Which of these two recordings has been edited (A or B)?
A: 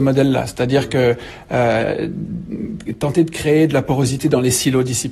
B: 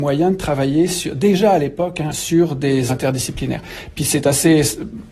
B